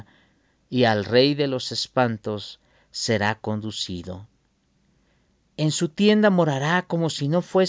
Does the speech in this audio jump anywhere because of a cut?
no; 0 cuts

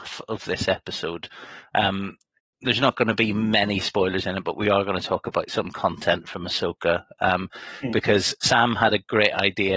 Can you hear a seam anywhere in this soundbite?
no; 0 cuts

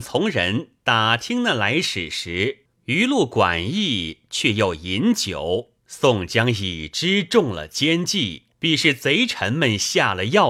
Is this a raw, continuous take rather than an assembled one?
no; 3 cuts; at 2.7 s, 5.8 s, 8.5 s

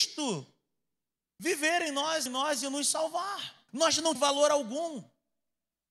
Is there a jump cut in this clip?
yes; 3 cuts; at 2.3 s, 3.7 s, 4.2 s

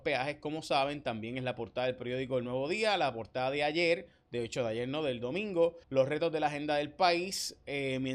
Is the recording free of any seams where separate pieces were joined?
no; 1 cut; at 5.8 s

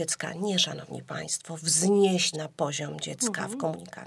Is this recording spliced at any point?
yes; 1 cut; at 2.3 s

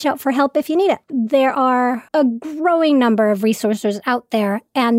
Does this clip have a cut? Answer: yes; 2 cuts; at 1.0 s, 2.1 s

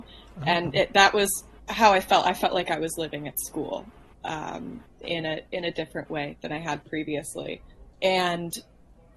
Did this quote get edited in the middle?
yes; 1 cut; at 7.9 s

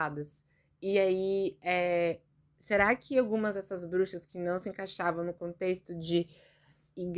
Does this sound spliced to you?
no; 0 cuts

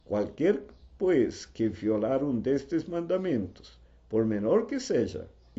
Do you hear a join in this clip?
no; 0 cuts

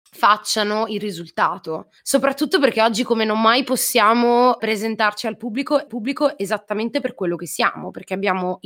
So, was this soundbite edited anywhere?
yes; 3 cuts; at 2.0 s, 4.6 s, 5.9 s

